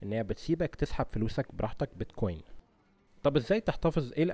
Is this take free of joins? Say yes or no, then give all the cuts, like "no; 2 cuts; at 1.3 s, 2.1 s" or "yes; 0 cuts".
yes; 0 cuts